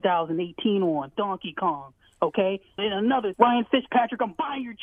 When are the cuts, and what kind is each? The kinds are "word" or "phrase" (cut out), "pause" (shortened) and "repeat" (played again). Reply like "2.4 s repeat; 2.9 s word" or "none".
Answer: 1.2 s word; 2.8 s word; 3.3 s word

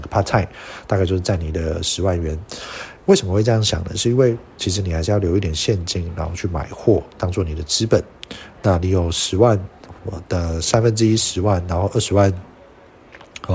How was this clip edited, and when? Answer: 10.0 s pause

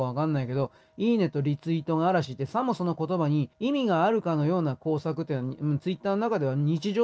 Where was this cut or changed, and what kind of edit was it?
3.5 s pause

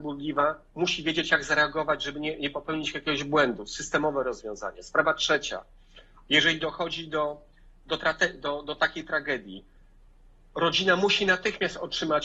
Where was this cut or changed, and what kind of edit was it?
none

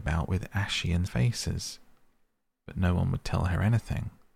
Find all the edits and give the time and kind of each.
1.1 s word

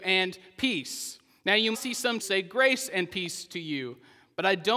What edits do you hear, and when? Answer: 1.7 s word; 2.2 s word

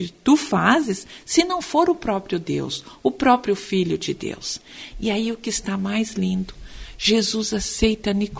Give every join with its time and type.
none

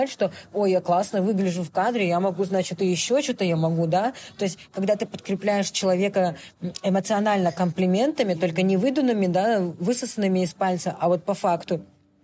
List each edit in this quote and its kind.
none

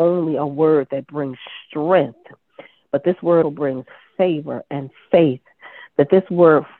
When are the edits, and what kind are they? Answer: 3.4 s word

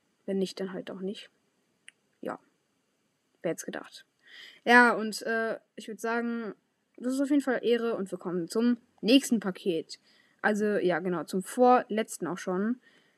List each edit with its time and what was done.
none

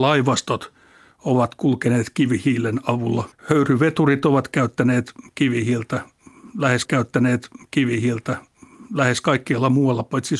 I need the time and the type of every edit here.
3.3 s pause; 6.8 s repeat

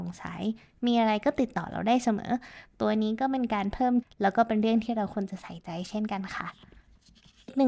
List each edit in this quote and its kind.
4.0 s phrase

